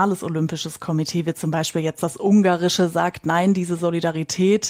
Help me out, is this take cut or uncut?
uncut